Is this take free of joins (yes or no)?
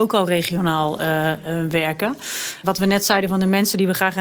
no